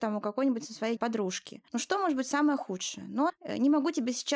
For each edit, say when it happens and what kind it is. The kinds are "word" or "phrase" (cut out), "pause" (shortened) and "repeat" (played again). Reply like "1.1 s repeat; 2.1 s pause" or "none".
1.0 s phrase; 1.7 s pause; 3.3 s phrase